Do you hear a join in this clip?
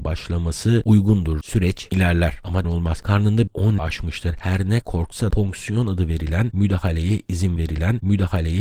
yes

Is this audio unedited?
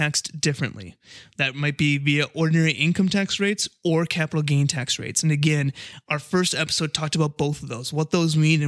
yes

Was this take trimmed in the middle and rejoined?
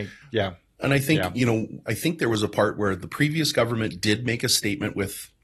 no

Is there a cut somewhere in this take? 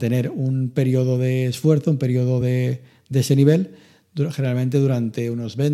no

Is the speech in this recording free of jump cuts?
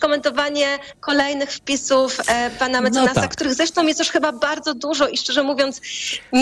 yes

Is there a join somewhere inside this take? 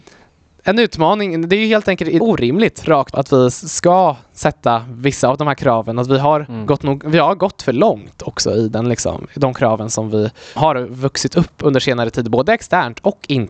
yes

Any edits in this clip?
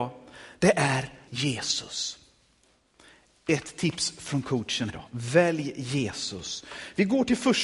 yes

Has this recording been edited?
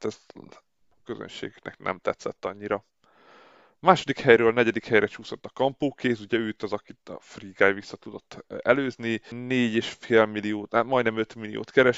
no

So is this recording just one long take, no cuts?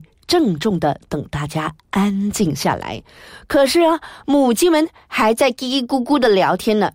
yes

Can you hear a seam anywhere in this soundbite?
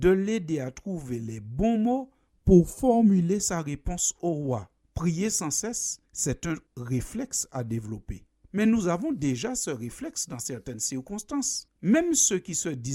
no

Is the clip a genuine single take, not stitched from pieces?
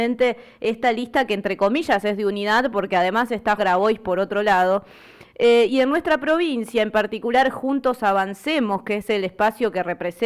no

